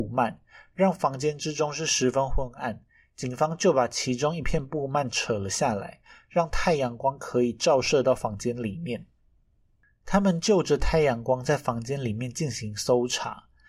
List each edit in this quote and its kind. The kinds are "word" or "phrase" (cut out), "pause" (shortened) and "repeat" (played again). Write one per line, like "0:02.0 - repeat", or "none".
none